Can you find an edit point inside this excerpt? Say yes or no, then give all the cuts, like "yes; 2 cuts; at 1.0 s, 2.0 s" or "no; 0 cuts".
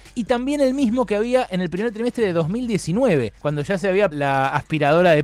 yes; 2 cuts; at 3.4 s, 4.1 s